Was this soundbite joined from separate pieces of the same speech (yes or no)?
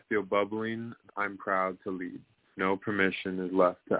yes